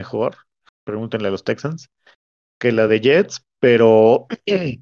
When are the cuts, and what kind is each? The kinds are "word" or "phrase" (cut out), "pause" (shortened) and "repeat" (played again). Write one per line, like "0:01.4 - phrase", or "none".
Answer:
none